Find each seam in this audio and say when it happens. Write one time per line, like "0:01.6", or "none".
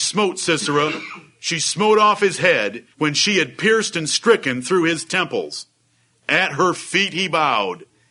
0:02.9